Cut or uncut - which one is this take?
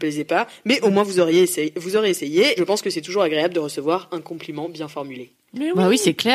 cut